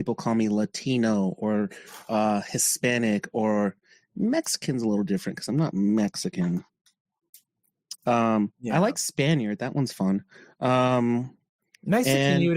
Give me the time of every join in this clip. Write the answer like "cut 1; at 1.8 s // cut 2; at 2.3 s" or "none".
none